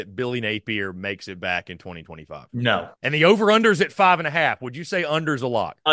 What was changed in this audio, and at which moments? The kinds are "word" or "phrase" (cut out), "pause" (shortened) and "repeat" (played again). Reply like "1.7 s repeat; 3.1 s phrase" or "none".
3.0 s pause